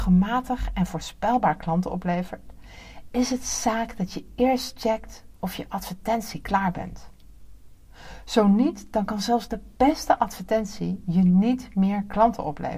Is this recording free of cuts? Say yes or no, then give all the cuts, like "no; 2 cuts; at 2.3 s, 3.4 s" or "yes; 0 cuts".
yes; 0 cuts